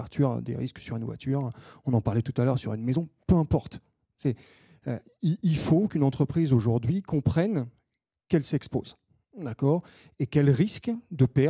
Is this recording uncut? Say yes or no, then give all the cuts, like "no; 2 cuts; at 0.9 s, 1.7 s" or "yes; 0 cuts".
yes; 0 cuts